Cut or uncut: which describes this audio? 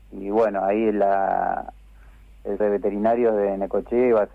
cut